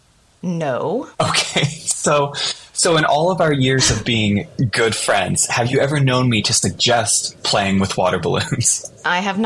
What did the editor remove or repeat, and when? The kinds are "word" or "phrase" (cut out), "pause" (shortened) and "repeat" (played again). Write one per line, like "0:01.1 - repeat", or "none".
0:01.1 - pause